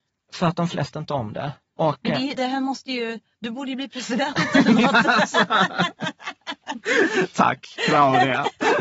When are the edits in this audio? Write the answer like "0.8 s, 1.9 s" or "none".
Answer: 0.9 s, 2.4 s